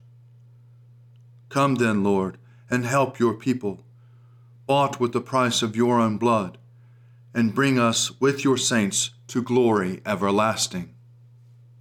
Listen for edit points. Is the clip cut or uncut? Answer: uncut